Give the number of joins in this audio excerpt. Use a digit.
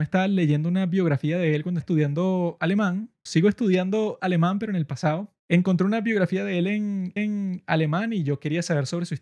4